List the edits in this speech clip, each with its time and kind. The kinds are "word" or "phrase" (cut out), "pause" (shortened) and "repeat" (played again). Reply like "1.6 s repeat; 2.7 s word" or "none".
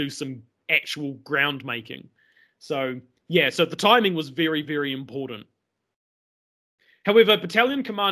none